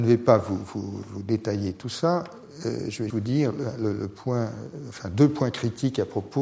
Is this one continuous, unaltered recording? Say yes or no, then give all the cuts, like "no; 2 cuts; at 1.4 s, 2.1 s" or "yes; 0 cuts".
no; 1 cut; at 3.1 s